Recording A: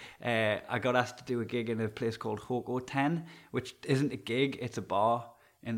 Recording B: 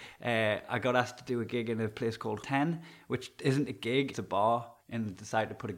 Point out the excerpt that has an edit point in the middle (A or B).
B